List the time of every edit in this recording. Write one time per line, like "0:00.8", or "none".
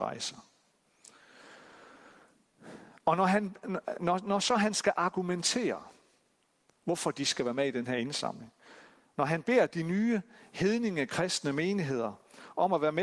none